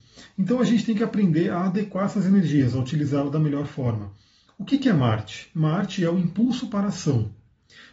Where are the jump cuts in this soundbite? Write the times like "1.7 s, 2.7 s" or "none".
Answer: none